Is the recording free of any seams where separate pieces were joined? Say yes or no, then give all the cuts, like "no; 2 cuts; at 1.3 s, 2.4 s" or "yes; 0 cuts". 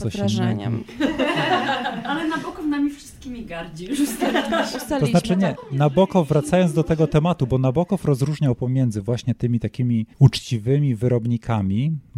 no; 1 cut; at 10.1 s